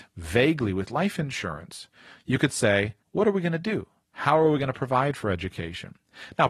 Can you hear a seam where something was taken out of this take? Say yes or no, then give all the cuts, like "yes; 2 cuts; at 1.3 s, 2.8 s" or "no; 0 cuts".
yes; 1 cut; at 3.0 s